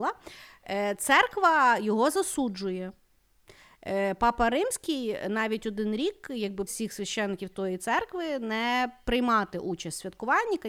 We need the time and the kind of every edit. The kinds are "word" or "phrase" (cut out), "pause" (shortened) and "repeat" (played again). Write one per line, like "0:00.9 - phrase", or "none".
0:06.7 - word